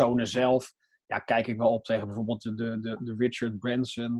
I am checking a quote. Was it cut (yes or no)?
no